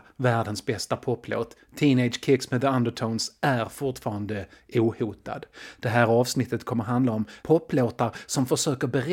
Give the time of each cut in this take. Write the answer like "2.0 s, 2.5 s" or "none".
7.4 s